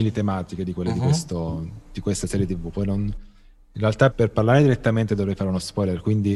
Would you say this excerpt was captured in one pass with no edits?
no; 1 cut; at 4.1 s

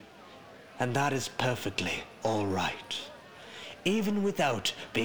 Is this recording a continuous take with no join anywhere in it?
yes; 0 cuts

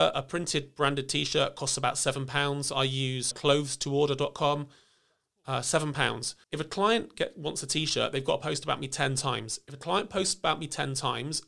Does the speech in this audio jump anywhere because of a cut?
yes; 2 cuts; at 3.3 s, 6.4 s

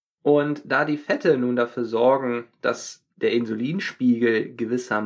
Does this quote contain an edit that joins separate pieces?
yes; 1 cut; at 3.1 s

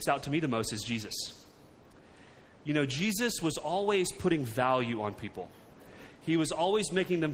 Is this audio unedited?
yes; 0 cuts

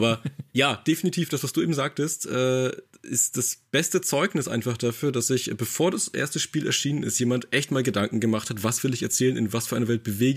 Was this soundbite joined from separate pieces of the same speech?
no; 0 cuts

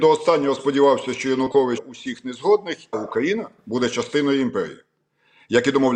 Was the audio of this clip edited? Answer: yes; 3 cuts; at 1.8 s, 2.9 s, 3.6 s

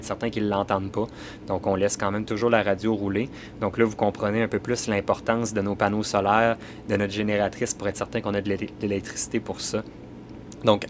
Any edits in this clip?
no; 0 cuts

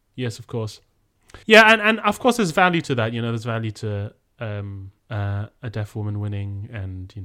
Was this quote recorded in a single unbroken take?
no; 2 cuts; at 1.4 s, 5.0 s

